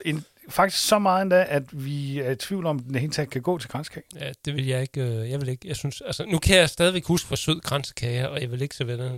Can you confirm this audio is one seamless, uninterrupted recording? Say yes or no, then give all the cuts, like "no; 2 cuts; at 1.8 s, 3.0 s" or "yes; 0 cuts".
no; 1 cut; at 6.3 s